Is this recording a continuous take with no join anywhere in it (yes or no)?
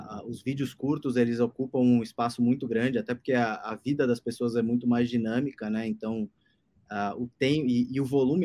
yes